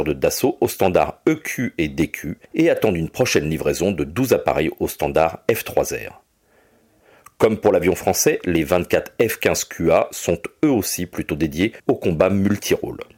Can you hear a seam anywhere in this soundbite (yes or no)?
yes